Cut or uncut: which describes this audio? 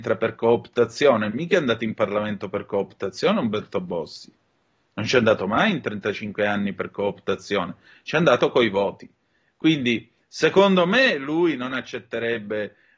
uncut